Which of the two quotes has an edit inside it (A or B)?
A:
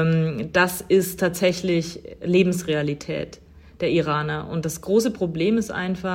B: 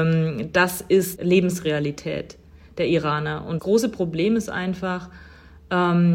B